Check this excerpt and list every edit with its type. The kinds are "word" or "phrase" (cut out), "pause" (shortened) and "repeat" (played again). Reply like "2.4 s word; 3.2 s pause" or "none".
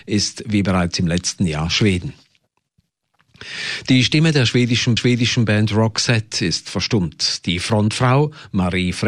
5.0 s repeat